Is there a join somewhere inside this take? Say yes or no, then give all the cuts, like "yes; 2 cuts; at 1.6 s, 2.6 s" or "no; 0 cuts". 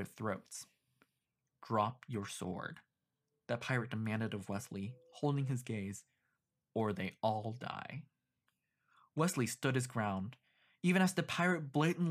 no; 0 cuts